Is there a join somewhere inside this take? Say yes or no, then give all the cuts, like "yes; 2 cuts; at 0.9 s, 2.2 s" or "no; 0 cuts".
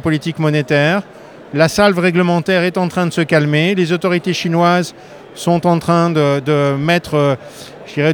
no; 0 cuts